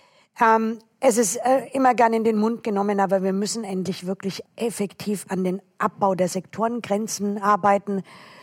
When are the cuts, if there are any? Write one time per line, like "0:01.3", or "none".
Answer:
0:04.5